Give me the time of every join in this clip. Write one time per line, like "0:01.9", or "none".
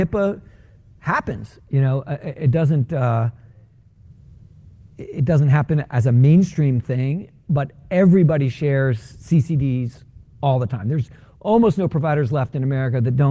none